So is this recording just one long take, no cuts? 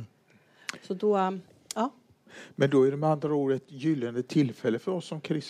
yes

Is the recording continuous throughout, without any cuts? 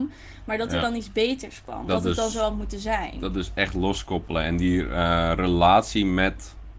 no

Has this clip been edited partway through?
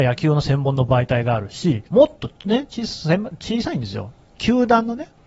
yes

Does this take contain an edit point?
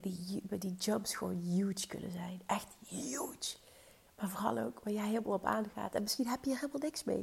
no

